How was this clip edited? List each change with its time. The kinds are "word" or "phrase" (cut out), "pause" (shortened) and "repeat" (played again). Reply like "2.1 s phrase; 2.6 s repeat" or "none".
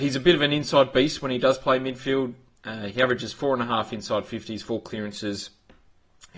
none